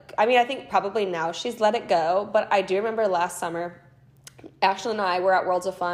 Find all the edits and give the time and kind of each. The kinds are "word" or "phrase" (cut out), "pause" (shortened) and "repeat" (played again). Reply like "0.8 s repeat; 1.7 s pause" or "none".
none